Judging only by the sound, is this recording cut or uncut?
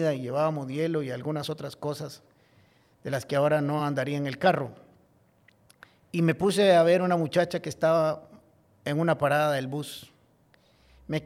uncut